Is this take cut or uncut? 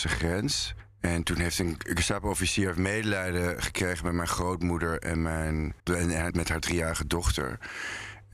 cut